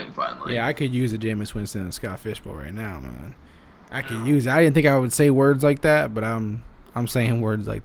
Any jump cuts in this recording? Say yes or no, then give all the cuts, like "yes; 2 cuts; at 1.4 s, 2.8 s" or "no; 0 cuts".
no; 0 cuts